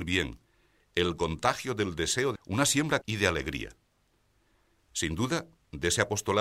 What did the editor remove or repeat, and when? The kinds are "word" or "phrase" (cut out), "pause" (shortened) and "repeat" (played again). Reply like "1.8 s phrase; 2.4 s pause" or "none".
2.4 s word; 3.0 s phrase